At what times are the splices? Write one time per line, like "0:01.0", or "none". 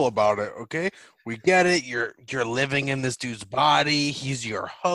none